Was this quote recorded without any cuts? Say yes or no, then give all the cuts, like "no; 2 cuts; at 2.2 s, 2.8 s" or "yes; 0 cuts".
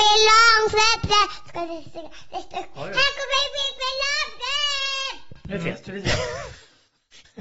yes; 0 cuts